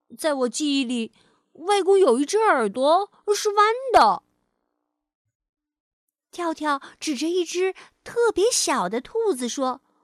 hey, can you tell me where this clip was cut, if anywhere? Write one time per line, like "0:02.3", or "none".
none